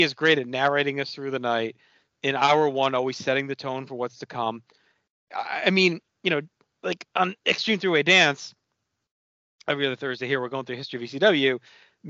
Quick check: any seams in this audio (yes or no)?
no